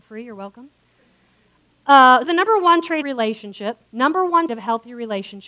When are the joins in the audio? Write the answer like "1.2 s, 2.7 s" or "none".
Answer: 2.2 s, 3.0 s, 3.9 s, 4.5 s